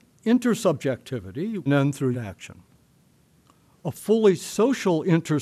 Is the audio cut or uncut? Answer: cut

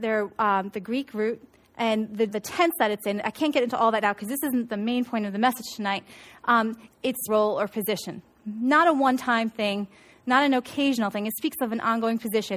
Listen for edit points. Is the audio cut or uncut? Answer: cut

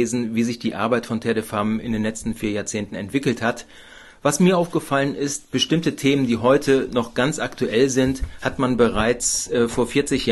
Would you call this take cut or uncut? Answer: uncut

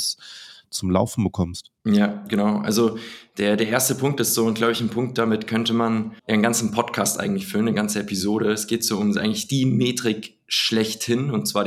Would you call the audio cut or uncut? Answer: cut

